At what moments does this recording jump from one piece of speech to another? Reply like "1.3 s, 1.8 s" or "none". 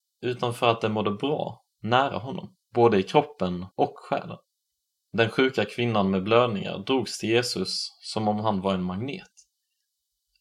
2.6 s, 3.7 s, 4.5 s